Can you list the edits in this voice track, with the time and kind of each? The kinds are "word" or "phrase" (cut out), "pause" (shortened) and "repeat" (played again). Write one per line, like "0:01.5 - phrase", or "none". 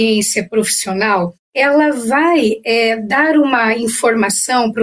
0:01.4 - pause

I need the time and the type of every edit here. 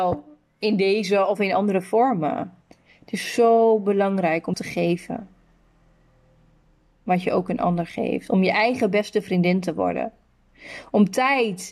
0:02.6 - pause
0:04.5 - word

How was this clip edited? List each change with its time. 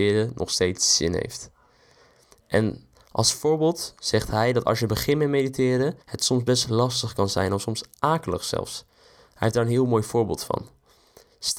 0:06.0 - pause

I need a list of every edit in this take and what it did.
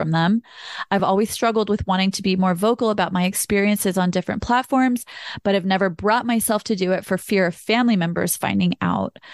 none

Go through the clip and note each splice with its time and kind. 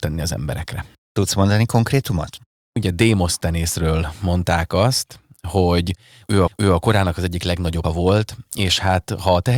0:06.5 - repeat
0:07.8 - word

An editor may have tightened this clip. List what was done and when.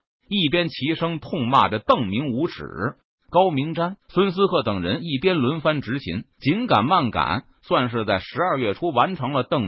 0:04.0 - pause
0:06.3 - pause

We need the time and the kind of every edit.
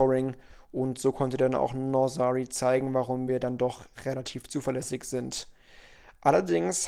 none

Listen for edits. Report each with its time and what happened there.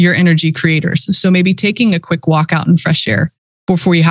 none

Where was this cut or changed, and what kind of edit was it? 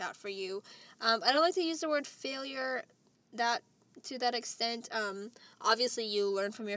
none

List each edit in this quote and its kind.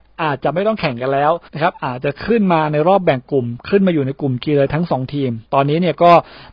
0:01.5 - pause
0:05.4 - pause

